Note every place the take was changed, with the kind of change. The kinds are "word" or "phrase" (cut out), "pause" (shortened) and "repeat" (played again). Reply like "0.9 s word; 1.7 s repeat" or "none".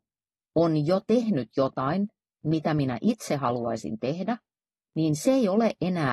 none